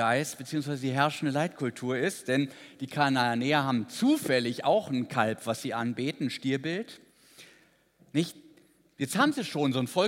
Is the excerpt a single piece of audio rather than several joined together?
yes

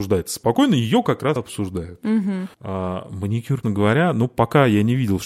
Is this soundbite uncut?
no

